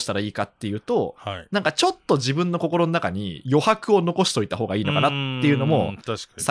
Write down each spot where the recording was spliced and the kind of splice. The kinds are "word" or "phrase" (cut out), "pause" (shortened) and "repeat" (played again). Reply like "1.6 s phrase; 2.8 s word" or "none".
none